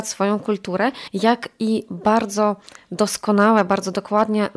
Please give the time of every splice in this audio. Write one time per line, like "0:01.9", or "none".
none

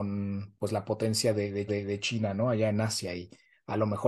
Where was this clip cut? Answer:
0:01.7

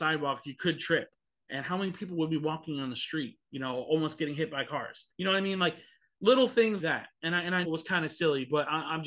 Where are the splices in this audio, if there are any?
0:05.1
0:06.8
0:07.6

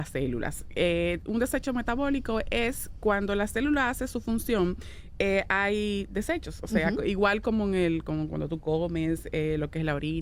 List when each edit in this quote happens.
none

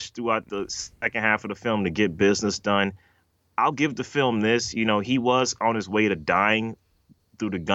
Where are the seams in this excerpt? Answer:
none

